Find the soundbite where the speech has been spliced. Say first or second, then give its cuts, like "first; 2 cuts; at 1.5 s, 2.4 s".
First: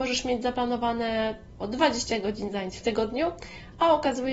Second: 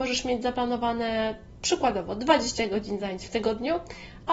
first; 1 cut; at 1.6 s